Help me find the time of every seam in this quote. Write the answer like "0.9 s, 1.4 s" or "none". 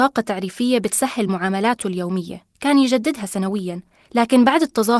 none